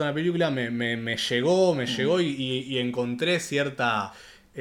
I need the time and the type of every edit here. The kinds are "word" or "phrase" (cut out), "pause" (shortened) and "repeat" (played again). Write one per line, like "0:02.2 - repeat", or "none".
none